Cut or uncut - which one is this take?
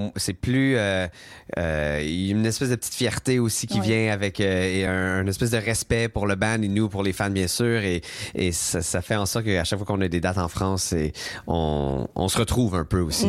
uncut